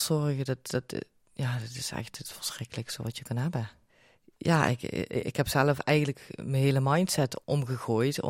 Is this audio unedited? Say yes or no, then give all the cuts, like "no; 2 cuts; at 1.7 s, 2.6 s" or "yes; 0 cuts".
no; 1 cut; at 3.9 s